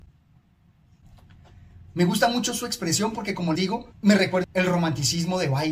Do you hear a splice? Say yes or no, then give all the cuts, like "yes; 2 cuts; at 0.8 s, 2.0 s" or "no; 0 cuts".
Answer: yes; 3 cuts; at 3.5 s, 3.9 s, 4.4 s